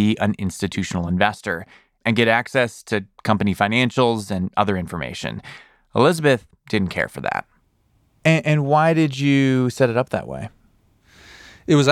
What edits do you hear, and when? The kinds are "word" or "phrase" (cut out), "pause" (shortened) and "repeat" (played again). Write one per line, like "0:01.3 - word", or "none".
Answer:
none